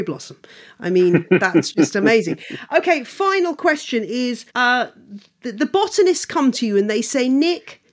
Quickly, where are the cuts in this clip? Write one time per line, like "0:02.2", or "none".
0:04.5